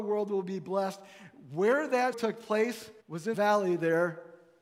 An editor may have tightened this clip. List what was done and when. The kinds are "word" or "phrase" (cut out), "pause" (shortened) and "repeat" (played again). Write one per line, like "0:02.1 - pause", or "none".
0:02.1 - word
0:03.0 - pause
0:03.3 - word